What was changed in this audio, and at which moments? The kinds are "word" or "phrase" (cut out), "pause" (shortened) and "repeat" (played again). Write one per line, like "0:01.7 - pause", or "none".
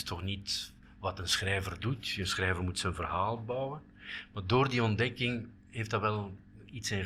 0:05.6 - pause